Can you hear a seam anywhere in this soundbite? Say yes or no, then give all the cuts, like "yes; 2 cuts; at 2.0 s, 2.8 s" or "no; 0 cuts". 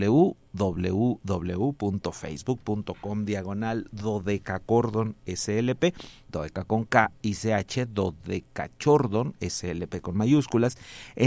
no; 0 cuts